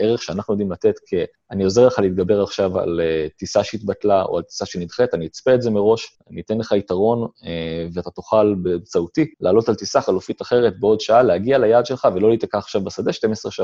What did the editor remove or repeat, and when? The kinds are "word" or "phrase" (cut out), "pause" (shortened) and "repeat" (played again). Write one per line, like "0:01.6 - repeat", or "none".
0:01.3 - pause
0:06.1 - pause
0:09.3 - pause